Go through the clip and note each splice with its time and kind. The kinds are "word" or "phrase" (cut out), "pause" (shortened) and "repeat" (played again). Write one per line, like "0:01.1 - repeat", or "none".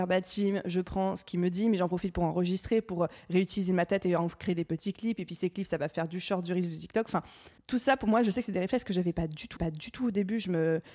0:07.6 - pause
0:09.6 - repeat